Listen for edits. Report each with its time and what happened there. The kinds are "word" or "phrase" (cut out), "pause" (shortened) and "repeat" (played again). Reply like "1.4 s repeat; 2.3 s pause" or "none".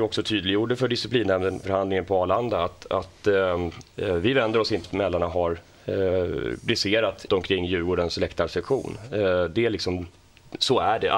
1.6 s phrase; 4.8 s phrase; 7.3 s phrase